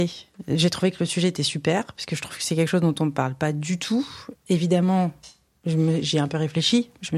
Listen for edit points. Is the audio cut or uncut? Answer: uncut